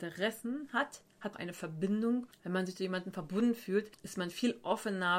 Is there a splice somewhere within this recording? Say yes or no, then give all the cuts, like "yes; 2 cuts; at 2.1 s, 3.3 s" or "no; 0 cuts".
yes; 1 cut; at 1.3 s